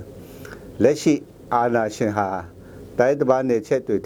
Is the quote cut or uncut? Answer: uncut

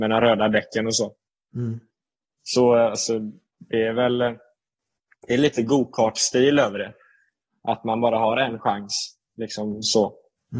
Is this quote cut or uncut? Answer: uncut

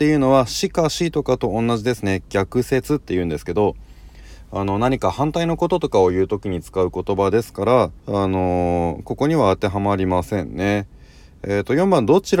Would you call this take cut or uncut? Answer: cut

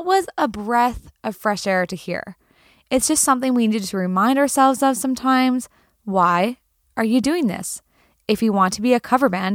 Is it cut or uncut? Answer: uncut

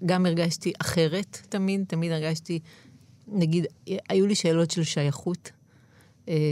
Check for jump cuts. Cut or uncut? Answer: uncut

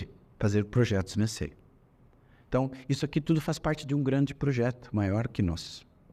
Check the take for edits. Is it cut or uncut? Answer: uncut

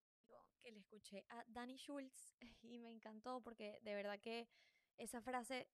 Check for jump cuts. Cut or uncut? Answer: uncut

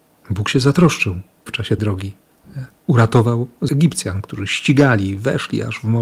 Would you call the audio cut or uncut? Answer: cut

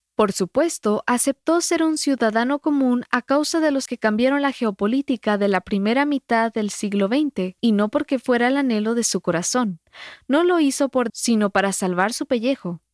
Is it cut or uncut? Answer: cut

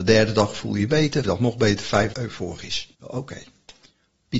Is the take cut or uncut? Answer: cut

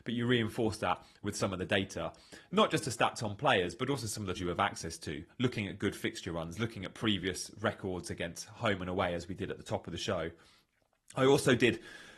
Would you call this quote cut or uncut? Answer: cut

